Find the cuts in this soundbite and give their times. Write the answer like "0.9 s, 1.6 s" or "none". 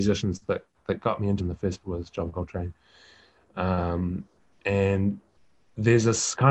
1.4 s, 1.8 s